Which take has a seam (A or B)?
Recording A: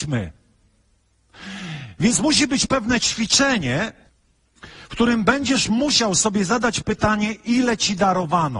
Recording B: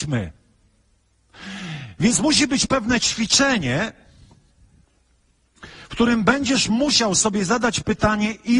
A